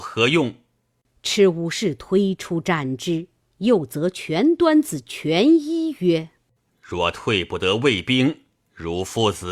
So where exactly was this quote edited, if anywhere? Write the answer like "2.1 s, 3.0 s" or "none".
none